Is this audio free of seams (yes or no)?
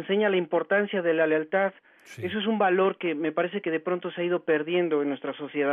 yes